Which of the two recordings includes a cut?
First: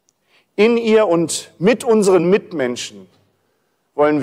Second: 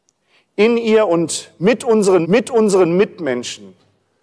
second; 1 cut; at 2.2 s

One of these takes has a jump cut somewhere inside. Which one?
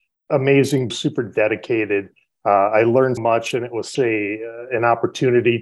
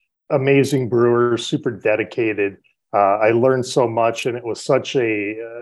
first; 3 cuts; at 0.9 s, 3.2 s, 4.0 s

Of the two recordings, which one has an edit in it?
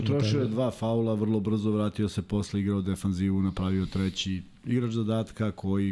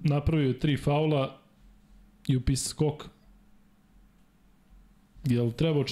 second; 1 cut; at 2.7 s

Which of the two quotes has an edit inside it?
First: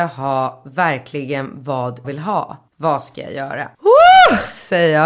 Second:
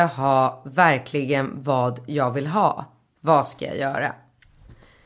first; 3 cuts; at 2.0 s, 2.7 s, 3.7 s

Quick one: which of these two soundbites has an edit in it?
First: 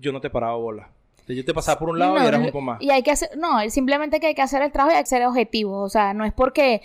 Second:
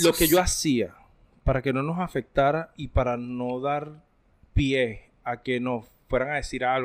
first; 2 cuts; at 2.5 s, 5.1 s

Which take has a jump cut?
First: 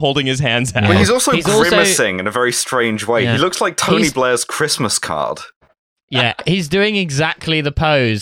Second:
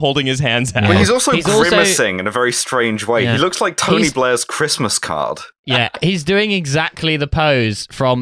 second; 1 cut; at 5.6 s

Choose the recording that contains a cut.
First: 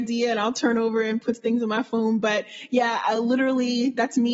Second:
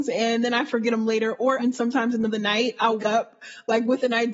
second; 4 cuts; at 0.9 s, 1.6 s, 2.3 s, 3.0 s

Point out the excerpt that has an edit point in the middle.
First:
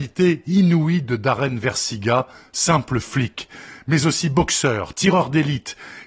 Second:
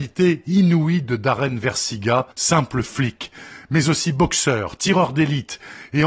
second; 1 cut; at 2.3 s

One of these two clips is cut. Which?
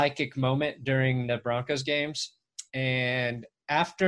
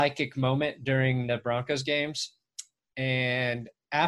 first; 1 cut; at 2.7 s

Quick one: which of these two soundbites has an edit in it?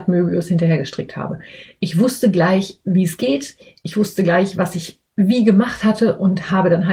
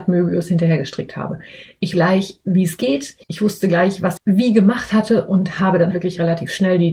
second; 4 cuts; at 1.9 s, 3.2 s, 4.2 s, 5.9 s

